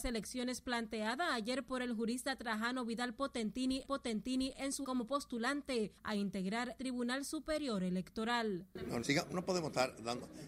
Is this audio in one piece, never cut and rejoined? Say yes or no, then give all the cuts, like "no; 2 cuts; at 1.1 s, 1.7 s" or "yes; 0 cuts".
no; 5 cuts; at 3.8 s, 4.8 s, 6.0 s, 6.8 s, 9.0 s